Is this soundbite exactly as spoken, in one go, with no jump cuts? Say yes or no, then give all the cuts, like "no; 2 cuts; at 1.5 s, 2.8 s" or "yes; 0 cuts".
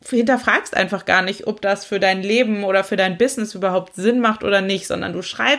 yes; 0 cuts